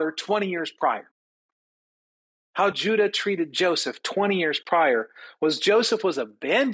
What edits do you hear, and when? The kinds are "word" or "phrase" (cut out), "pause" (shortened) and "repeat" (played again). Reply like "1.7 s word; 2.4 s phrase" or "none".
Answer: none